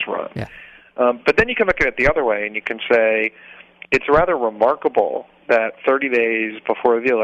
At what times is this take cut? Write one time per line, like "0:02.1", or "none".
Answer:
none